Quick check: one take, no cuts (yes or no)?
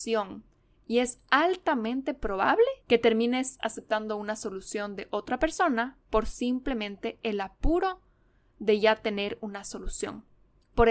no